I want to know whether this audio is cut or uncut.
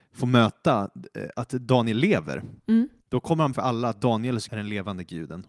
cut